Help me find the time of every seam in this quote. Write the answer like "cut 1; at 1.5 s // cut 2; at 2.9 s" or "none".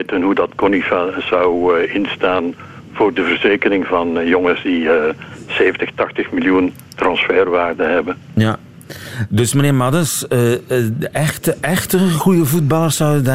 none